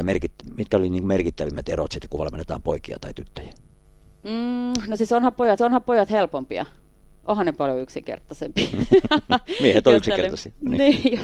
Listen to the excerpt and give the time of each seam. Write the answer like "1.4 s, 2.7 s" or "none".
5.6 s